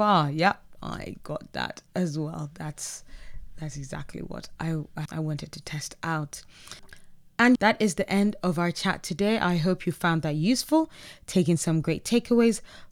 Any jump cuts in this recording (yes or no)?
no